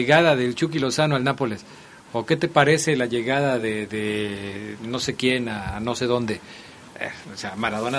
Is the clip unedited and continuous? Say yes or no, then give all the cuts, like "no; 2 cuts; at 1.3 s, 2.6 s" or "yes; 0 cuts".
yes; 0 cuts